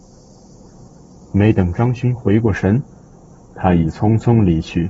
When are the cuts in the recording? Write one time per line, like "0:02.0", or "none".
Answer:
none